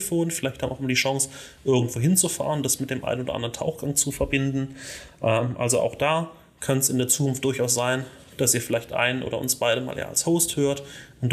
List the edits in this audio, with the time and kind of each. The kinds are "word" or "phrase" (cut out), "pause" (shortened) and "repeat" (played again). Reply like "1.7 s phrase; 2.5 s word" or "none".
none